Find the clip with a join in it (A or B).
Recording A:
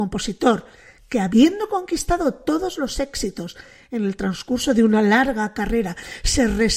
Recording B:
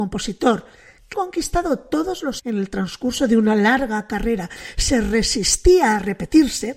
B